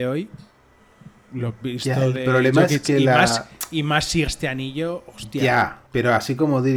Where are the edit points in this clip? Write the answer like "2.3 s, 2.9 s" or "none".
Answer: 1.6 s, 4.3 s, 5.9 s

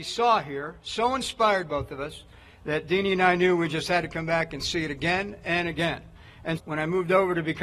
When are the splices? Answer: 6.6 s

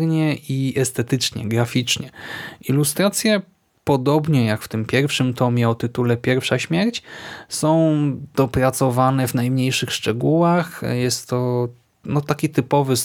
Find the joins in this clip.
none

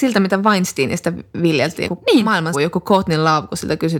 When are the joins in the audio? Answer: 1.9 s, 2.5 s

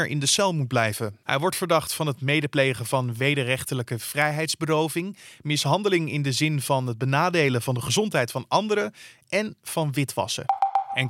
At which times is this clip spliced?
none

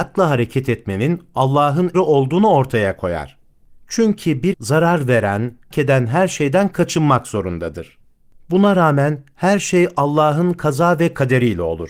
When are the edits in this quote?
1.9 s, 4.5 s, 5.7 s

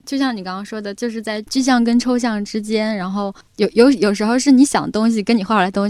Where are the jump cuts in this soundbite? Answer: 3.4 s

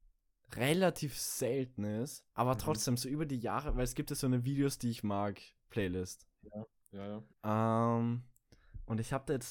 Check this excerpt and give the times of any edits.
2.3 s, 7.3 s

